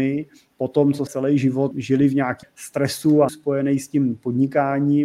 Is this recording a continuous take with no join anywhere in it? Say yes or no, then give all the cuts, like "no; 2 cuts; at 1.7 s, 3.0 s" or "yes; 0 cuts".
no; 4 cuts; at 1.1 s, 1.7 s, 2.4 s, 3.3 s